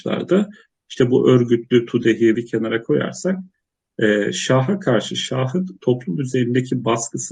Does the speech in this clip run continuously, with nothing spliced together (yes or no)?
no